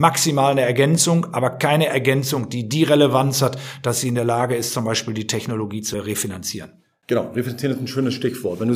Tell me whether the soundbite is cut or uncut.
uncut